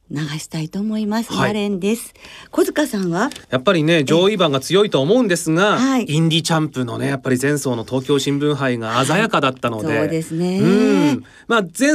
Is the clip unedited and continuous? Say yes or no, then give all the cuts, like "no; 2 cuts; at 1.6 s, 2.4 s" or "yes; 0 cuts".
no; 1 cut; at 3.4 s